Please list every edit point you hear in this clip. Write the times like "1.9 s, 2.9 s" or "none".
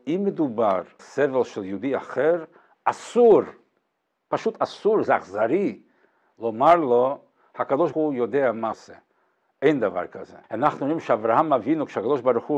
1.0 s, 7.9 s, 8.7 s, 10.4 s